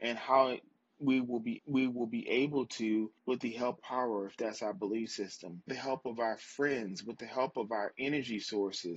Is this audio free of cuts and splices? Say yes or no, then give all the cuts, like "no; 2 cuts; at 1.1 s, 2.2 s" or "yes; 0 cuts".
no; 4 cuts; at 1.6 s, 3.2 s, 3.8 s, 5.7 s